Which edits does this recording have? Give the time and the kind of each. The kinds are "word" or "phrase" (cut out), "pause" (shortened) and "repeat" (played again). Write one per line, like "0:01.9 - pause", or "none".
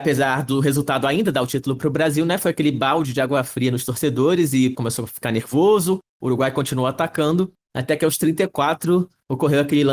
0:04.7 - phrase